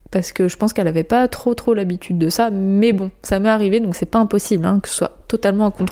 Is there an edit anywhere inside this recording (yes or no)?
no